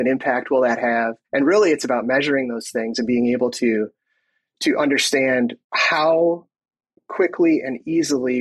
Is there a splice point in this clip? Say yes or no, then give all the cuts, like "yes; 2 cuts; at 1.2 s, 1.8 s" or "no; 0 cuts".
yes; 2 cuts; at 1.2 s, 5.6 s